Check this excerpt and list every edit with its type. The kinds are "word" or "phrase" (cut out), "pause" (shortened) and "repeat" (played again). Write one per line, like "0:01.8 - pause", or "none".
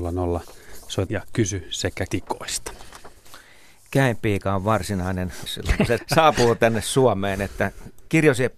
0:01.1 - word
0:02.1 - word
0:05.5 - word
0:06.0 - word